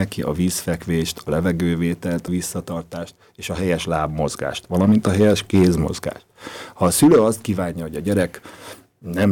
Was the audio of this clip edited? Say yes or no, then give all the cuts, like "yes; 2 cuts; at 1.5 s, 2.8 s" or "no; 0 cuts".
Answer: yes; 1 cut; at 2.3 s